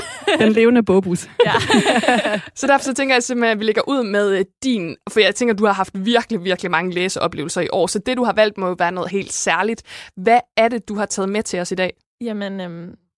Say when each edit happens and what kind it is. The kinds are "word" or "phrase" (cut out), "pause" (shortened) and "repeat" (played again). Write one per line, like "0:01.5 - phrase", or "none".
0:09.1 - word